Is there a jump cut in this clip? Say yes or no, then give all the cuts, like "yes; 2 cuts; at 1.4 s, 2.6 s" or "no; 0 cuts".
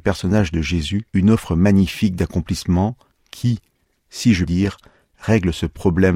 yes; 2 cuts; at 1.1 s, 4.5 s